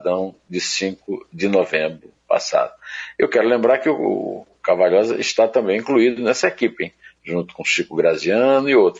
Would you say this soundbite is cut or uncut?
uncut